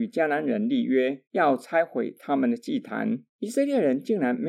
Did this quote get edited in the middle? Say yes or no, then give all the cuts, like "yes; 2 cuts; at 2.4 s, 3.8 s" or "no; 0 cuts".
yes; 2 cuts; at 1.3 s, 3.3 s